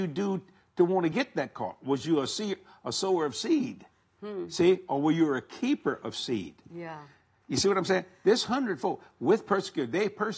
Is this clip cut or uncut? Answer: uncut